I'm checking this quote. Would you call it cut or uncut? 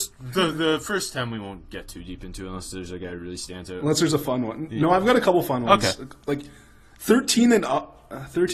uncut